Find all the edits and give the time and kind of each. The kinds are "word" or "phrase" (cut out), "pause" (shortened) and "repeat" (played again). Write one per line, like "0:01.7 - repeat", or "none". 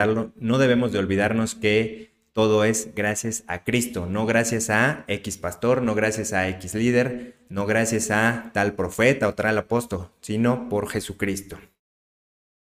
none